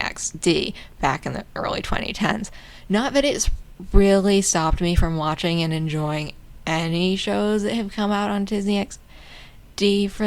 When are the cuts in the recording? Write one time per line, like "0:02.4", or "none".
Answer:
none